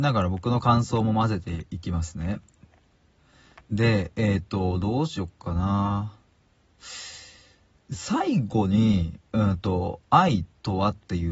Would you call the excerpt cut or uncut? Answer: uncut